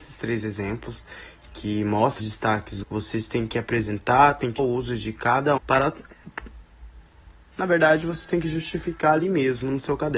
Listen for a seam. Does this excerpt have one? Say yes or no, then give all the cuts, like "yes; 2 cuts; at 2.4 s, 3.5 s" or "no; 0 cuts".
yes; 4 cuts; at 2.2 s, 2.8 s, 4.6 s, 5.6 s